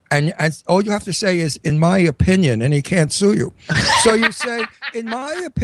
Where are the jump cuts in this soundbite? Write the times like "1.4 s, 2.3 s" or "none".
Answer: none